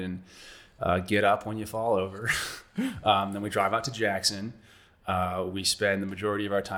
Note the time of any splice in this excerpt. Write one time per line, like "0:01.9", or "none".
none